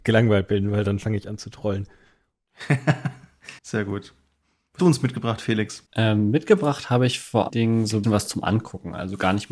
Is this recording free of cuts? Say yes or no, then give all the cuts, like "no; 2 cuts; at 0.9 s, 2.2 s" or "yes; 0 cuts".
no; 5 cuts; at 3.6 s, 4.8 s, 5.9 s, 7.5 s, 8.0 s